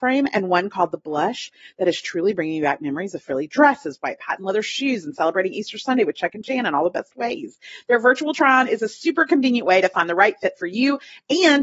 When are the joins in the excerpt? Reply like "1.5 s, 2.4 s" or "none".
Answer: none